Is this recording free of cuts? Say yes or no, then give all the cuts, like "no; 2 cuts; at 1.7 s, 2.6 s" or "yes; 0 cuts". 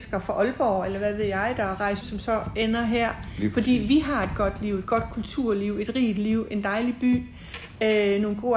no; 1 cut; at 2.0 s